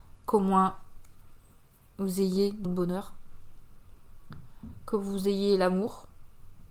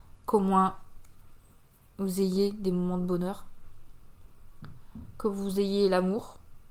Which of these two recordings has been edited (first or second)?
first